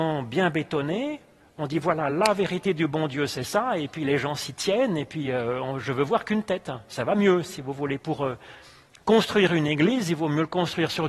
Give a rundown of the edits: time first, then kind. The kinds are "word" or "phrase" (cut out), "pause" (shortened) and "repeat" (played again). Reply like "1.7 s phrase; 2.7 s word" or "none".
none